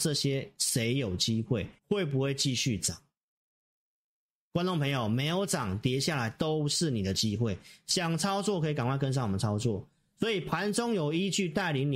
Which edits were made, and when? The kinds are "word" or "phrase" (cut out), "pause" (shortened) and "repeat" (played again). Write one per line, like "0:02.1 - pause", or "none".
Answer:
0:01.8 - pause